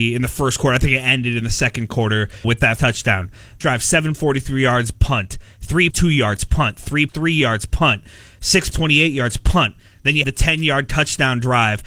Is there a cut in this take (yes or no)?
yes